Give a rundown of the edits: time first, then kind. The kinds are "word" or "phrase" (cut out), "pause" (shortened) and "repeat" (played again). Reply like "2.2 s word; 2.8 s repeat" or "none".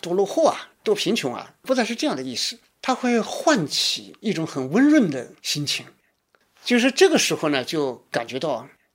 none